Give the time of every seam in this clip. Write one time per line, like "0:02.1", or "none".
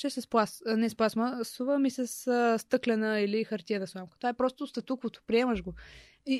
none